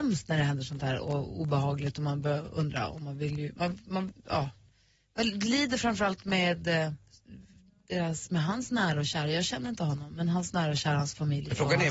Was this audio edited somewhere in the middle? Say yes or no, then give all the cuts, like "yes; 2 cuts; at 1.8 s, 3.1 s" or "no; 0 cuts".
no; 0 cuts